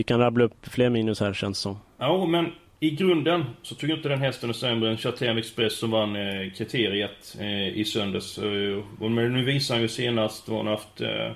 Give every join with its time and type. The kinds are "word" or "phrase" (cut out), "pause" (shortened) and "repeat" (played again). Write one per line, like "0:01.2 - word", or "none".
none